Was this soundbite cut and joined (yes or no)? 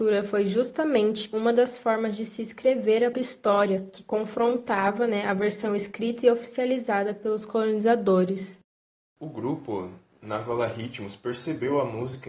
yes